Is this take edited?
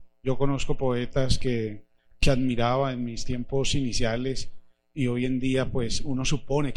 no; 0 cuts

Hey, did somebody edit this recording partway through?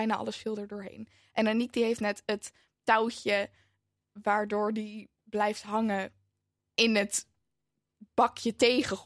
no; 0 cuts

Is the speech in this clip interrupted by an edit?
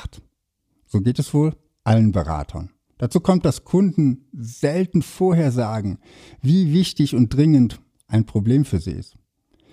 no; 0 cuts

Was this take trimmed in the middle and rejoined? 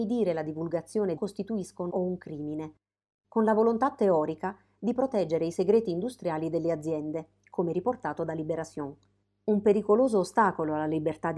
yes; 2 cuts; at 1.2 s, 1.9 s

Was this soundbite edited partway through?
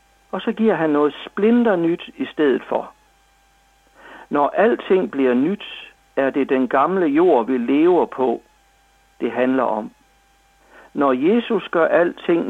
no; 0 cuts

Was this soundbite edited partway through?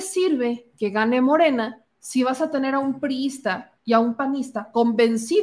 yes; 2 cuts; at 1.9 s, 3.8 s

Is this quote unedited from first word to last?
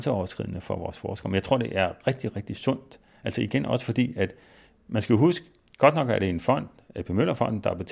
yes; 0 cuts

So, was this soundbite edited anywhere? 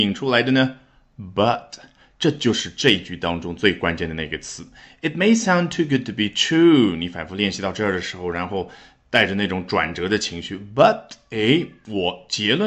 no; 0 cuts

